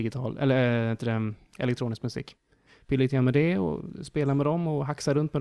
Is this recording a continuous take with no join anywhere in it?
yes; 0 cuts

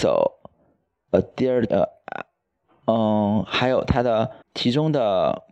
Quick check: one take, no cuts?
no; 2 cuts; at 1.7 s, 4.4 s

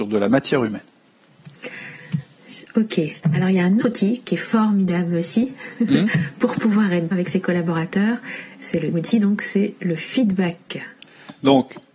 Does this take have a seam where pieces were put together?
yes; 3 cuts; at 3.8 s, 7.1 s, 8.9 s

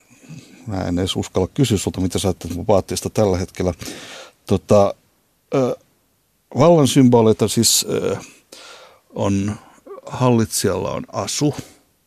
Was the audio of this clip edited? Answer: no; 0 cuts

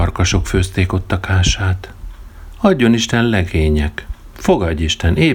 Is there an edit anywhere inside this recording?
no; 0 cuts

